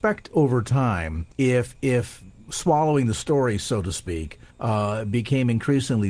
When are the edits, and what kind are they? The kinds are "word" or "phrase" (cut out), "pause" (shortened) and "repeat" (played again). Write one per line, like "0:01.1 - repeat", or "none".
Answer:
0:01.3 - pause
0:04.5 - pause